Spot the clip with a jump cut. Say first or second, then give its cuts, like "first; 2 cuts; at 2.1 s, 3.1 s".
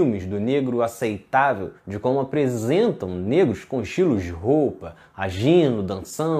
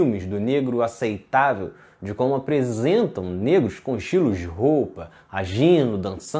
first; 1 cut; at 1.8 s